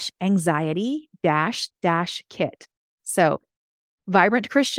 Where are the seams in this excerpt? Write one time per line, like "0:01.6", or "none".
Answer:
0:01.7